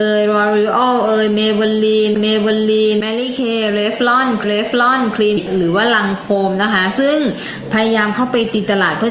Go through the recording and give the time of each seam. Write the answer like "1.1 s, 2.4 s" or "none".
2.2 s, 4.4 s, 5.4 s